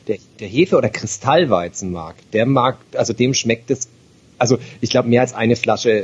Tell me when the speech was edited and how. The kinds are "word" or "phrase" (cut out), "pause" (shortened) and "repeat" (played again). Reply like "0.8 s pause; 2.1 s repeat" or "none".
none